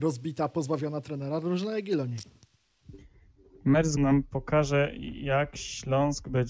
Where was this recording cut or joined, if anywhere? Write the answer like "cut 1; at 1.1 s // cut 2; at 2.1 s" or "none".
cut 1; at 4.0 s